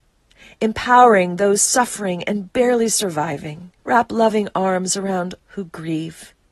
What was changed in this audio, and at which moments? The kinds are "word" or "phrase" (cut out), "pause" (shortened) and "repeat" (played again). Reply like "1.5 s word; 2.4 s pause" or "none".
3.8 s pause; 5.4 s word